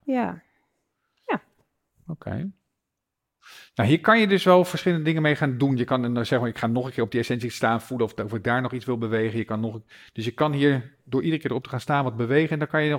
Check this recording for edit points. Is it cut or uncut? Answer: uncut